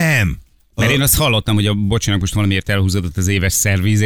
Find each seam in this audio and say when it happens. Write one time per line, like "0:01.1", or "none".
none